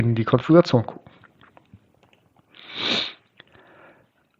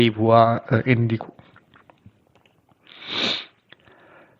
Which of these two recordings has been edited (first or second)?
second